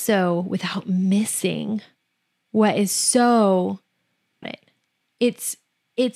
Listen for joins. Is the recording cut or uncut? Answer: cut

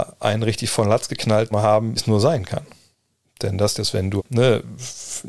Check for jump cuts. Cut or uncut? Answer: cut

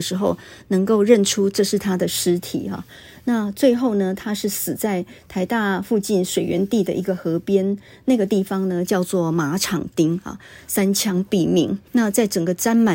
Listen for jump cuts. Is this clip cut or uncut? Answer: cut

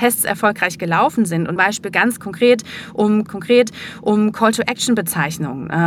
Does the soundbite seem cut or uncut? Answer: cut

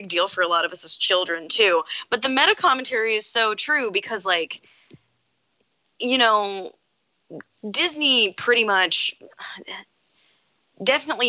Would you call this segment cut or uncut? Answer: uncut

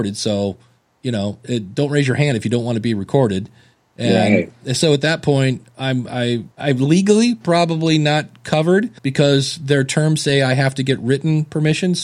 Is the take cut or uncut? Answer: cut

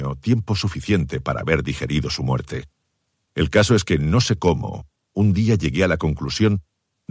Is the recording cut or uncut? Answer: uncut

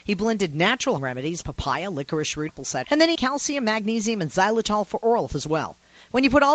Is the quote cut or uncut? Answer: cut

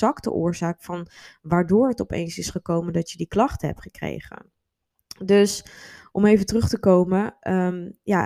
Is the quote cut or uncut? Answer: uncut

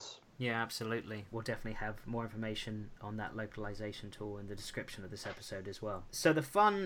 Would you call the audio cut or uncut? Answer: uncut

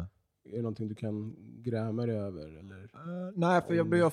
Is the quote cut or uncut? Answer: uncut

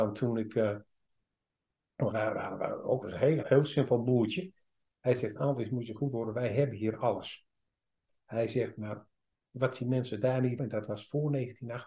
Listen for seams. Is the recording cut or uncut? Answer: cut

